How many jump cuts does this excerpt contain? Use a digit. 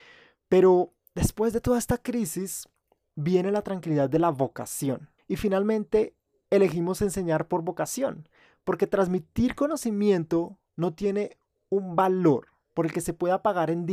0